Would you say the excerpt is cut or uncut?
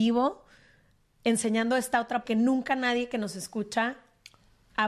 cut